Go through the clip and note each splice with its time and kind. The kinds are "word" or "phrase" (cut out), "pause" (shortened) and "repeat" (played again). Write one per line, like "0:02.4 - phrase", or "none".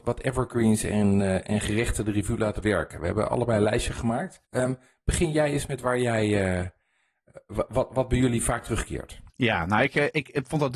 0:02.6 - phrase
0:04.4 - pause
0:09.3 - pause